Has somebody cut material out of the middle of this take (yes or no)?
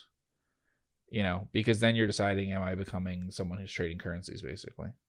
no